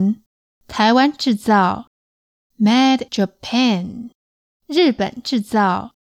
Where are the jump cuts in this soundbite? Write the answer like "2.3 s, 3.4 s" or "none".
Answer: 3.1 s

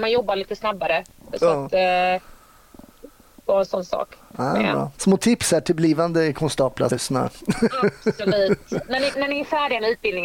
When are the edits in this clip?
5.0 s, 6.9 s, 9.1 s

